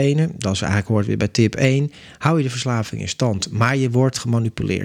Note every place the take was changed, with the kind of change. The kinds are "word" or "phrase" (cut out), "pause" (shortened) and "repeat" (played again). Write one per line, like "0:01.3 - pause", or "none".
none